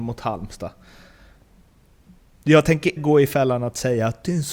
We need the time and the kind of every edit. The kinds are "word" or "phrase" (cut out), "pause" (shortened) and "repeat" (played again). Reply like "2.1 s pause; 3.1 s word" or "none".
3.0 s word